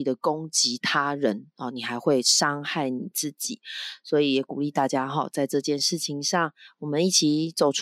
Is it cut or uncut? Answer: uncut